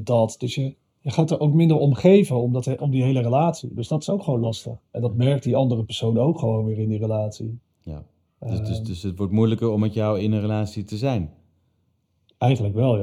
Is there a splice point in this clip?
no; 0 cuts

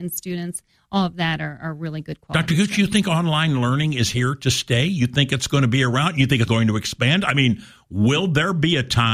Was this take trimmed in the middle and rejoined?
yes; 1 cut; at 6.5 s

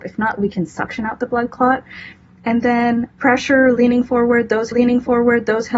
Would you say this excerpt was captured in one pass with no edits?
no; 1 cut; at 4.7 s

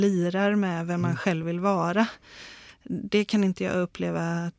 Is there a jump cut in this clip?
no; 0 cuts

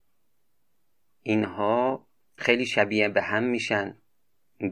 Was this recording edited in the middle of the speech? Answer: no; 0 cuts

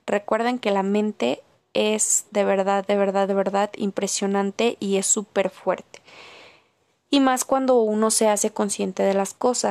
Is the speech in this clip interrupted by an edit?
no; 0 cuts

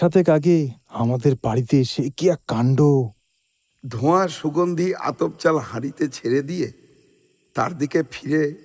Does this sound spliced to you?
no; 0 cuts

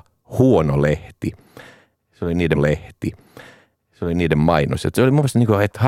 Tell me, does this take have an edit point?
yes; 1 cut; at 2.5 s

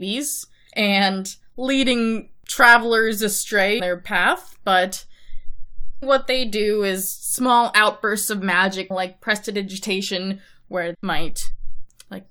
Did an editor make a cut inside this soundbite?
yes; 4 cuts; at 3.8 s, 6.0 s, 8.9 s, 10.9 s

